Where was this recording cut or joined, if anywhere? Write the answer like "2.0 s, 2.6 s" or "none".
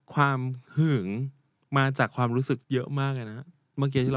2.6 s